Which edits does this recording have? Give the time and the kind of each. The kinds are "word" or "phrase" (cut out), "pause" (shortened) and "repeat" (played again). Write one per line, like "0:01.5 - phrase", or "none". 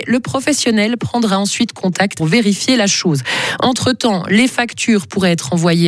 0:02.2 - phrase